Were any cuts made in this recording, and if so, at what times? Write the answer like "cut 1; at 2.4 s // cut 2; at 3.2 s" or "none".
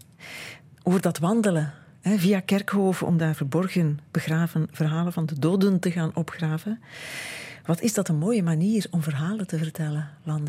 none